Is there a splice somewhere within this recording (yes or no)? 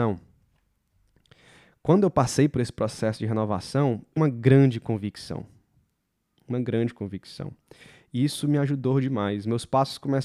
yes